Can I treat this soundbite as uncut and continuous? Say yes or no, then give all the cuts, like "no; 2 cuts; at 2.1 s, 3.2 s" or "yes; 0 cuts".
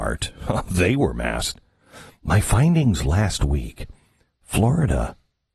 yes; 0 cuts